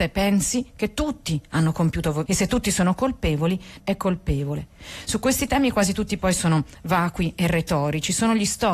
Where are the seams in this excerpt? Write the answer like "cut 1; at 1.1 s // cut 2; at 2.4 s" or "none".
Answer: cut 1; at 2.3 s // cut 2; at 3.8 s // cut 3; at 6.2 s